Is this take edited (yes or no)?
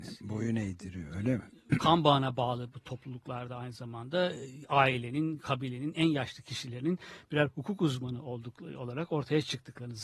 no